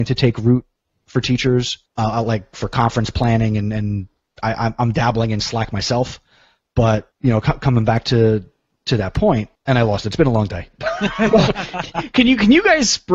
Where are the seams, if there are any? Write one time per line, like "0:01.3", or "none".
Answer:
none